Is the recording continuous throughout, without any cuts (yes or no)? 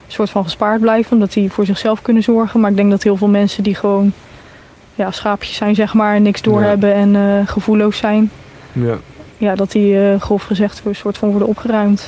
yes